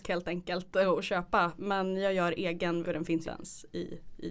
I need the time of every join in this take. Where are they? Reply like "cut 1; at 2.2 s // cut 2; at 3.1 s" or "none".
cut 1; at 2.8 s // cut 2; at 3.2 s